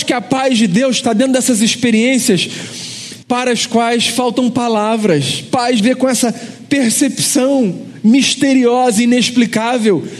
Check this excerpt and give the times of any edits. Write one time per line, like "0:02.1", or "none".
0:03.2
0:05.8